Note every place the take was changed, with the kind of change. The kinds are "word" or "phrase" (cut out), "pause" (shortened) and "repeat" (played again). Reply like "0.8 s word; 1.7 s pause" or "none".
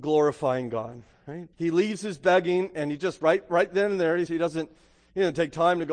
1.5 s pause; 4.3 s phrase